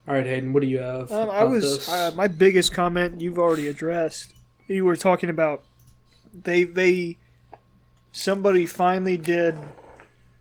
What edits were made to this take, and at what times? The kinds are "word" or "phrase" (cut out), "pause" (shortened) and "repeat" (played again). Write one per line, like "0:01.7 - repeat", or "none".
none

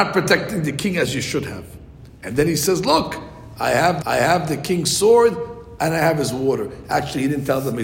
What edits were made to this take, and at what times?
0:04.0 - repeat

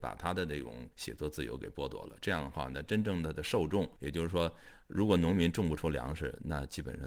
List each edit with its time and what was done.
0:00.9 - pause
0:04.0 - pause

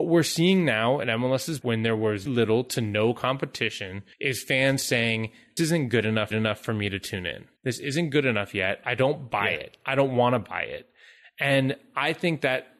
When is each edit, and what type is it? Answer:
0:01.6 - word
0:02.3 - word
0:04.1 - pause
0:05.6 - word
0:06.3 - repeat
0:07.6 - pause

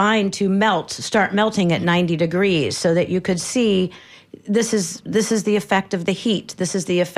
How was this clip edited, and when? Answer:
none

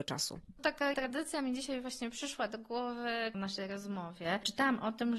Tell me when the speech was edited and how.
0:00.9 - word
0:03.3 - phrase

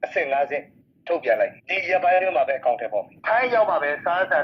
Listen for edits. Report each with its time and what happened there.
0:01.6 - pause

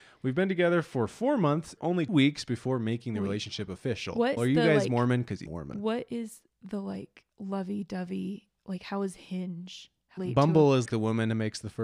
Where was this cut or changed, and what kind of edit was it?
0:01.8 - phrase
0:02.1 - word
0:04.4 - word
0:05.5 - word
0:07.3 - pause
0:10.2 - phrase
0:10.9 - word

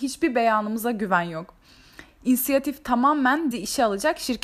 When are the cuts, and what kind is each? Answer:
0:03.5 - word

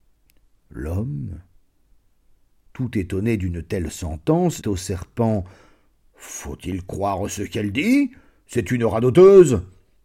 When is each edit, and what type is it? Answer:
0:04.6 - word

